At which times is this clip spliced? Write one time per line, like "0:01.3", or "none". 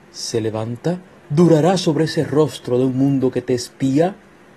0:01.1